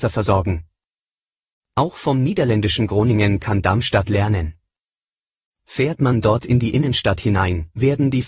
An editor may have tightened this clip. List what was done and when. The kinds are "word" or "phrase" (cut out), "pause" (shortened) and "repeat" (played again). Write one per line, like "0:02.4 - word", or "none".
none